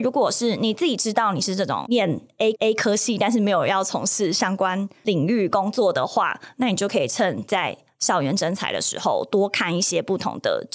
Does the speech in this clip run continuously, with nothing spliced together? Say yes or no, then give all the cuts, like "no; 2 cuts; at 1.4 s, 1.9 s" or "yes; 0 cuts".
no; 1 cut; at 2.5 s